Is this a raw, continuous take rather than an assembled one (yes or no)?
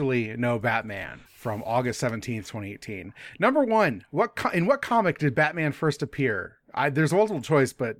no